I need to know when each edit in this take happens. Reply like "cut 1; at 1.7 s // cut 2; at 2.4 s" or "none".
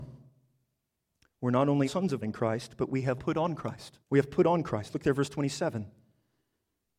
cut 1; at 1.8 s // cut 2; at 2.2 s // cut 3; at 3.2 s // cut 4; at 4.0 s